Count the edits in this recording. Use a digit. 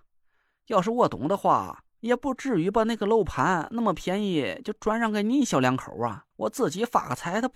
1